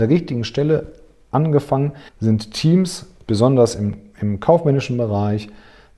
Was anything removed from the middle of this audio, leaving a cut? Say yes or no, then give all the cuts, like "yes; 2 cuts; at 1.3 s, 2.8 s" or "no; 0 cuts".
yes; 1 cut; at 2.1 s